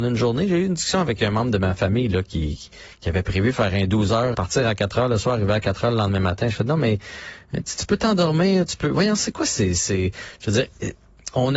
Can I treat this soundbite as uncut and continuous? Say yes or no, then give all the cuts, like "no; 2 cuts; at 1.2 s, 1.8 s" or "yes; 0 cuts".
no; 1 cut; at 4.3 s